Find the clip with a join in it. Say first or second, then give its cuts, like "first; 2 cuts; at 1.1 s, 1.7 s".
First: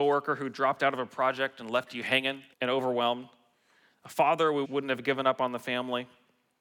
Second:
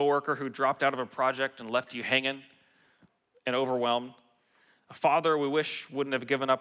first; 2 cuts; at 2.5 s, 4.6 s